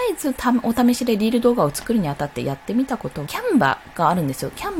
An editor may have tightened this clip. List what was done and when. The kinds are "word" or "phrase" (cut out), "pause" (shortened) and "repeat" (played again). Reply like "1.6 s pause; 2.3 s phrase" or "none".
3.3 s phrase